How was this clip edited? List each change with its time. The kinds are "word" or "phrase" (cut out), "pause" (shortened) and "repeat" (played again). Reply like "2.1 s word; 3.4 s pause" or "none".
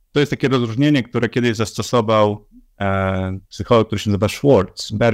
3.4 s pause